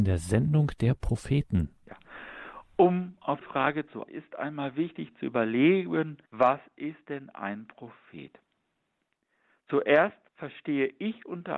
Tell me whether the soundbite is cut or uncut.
cut